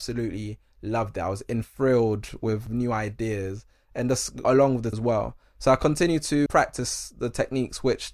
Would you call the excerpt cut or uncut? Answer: cut